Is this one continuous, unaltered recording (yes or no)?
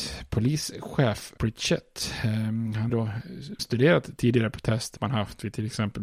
no